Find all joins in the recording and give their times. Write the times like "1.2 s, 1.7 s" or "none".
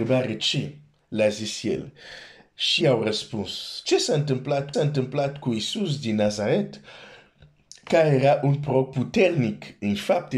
2.8 s, 4.7 s